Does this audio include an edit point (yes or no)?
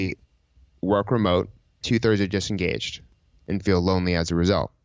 yes